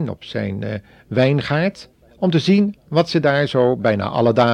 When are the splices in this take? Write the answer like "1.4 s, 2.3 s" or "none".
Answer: 2.1 s